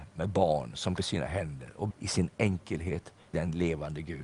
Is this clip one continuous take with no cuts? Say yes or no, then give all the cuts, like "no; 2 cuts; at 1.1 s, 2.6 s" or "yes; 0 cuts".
no; 3 cuts; at 1.0 s, 1.9 s, 3.3 s